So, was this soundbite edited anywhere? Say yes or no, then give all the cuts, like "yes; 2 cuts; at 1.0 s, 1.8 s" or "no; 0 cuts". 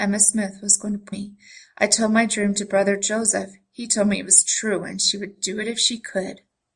yes; 1 cut; at 1.1 s